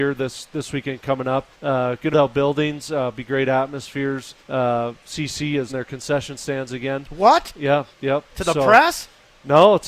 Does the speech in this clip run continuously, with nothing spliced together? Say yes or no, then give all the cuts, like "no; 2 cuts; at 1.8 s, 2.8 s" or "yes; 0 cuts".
no; 4 cuts; at 1.5 s, 2.1 s, 4.4 s, 5.7 s